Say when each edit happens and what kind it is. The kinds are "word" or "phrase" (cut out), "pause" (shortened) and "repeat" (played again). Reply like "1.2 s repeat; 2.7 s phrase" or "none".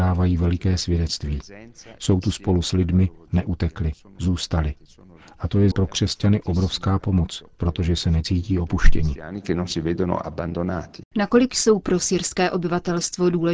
5.7 s word